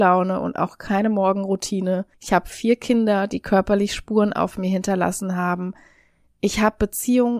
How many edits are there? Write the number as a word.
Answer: one